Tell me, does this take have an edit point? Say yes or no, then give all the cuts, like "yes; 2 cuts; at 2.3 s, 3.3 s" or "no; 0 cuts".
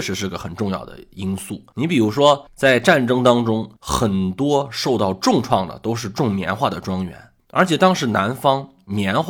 yes; 2 cuts; at 3.8 s, 7.4 s